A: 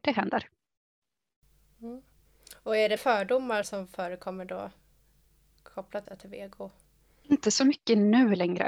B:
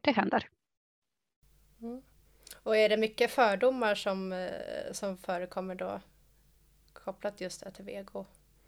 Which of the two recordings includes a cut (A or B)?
A